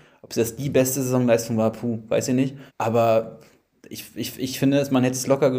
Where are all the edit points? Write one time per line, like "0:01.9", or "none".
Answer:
0:02.7